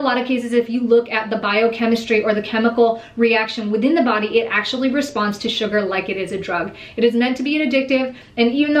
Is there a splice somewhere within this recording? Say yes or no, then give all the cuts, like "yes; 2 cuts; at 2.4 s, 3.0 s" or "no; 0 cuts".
no; 0 cuts